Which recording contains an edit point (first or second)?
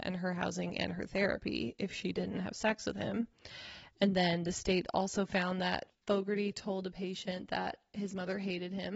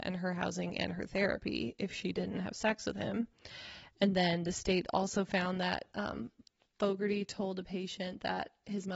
first